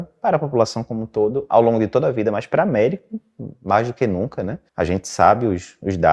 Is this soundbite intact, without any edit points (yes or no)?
no